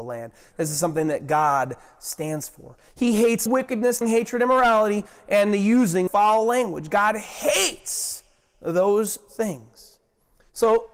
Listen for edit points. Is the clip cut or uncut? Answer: cut